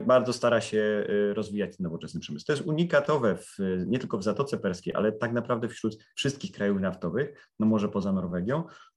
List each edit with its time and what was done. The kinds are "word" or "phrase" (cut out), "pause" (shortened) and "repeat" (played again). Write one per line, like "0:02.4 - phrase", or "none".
0:06.1 - pause

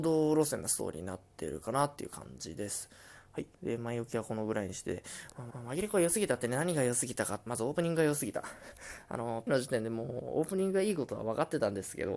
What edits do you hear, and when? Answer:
0:03.5 - pause
0:05.5 - repeat
0:07.5 - phrase
0:09.5 - word

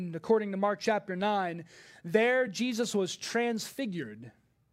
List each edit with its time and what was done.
none

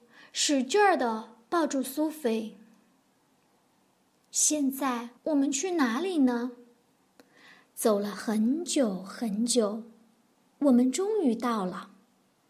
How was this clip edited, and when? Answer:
0:05.2 - pause

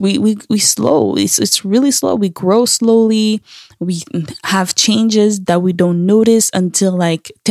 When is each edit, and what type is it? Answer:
none

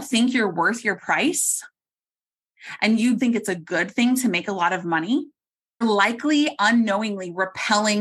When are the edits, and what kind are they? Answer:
0:03.2 - word
0:05.8 - word

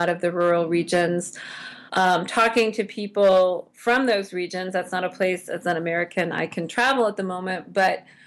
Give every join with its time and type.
0:01.9 - pause

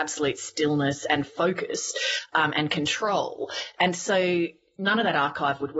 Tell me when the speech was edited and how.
none

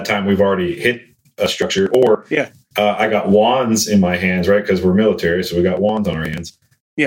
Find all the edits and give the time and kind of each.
none

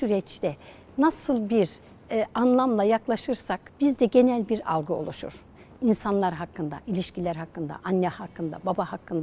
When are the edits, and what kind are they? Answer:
0:03.7 - pause

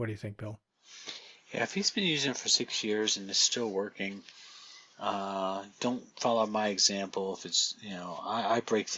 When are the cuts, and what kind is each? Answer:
none

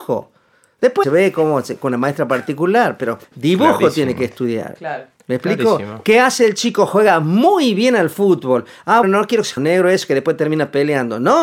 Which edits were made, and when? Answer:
0:01.0 - phrase
0:03.2 - pause
0:05.2 - pause
0:09.0 - phrase
0:09.6 - phrase

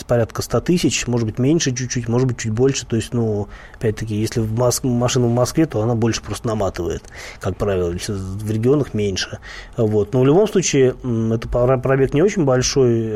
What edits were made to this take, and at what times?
none

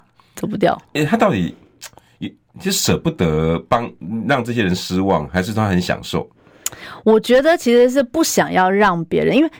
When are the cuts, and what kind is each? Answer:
none

